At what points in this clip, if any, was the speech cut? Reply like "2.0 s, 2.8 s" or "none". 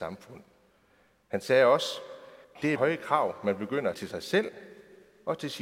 2.4 s, 2.8 s, 3.9 s